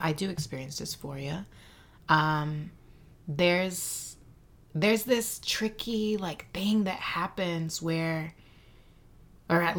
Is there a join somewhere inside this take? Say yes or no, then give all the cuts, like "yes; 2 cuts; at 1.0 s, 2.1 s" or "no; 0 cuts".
no; 0 cuts